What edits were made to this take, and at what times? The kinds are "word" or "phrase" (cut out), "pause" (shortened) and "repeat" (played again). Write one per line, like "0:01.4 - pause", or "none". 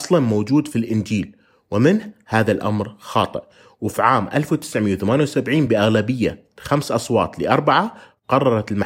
none